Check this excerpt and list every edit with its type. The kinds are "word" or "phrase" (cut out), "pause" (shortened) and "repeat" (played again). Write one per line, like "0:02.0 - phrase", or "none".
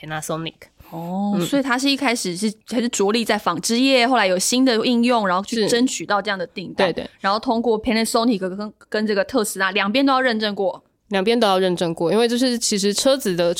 0:02.6 - pause